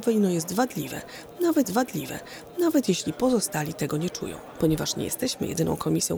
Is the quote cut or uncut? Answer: cut